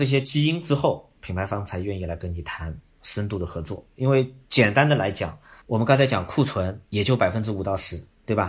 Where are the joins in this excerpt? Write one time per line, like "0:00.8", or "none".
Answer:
0:05.6
0:06.8